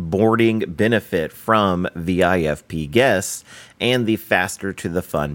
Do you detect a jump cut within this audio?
no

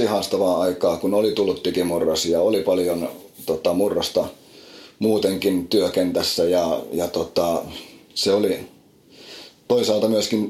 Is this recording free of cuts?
yes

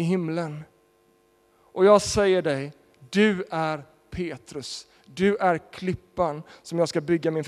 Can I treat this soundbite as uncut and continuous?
yes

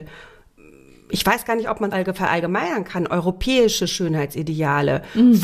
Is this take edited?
yes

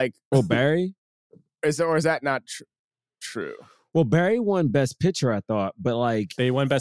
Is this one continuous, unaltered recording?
yes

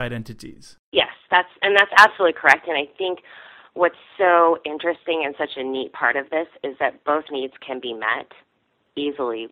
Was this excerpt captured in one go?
yes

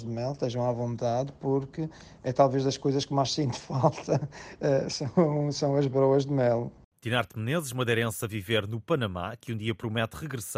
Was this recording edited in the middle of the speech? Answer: no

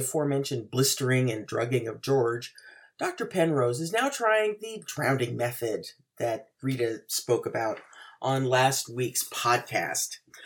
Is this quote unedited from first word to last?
yes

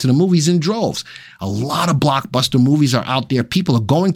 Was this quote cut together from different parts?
no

